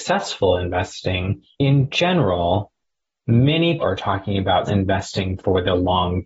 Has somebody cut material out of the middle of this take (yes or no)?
yes